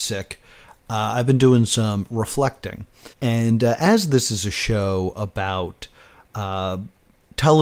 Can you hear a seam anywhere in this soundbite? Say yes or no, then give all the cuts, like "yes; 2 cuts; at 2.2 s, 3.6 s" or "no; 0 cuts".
yes; 1 cut; at 3.1 s